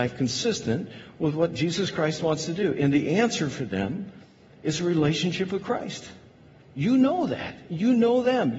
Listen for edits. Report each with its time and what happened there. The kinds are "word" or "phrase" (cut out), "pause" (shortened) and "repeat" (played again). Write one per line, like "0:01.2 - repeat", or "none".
none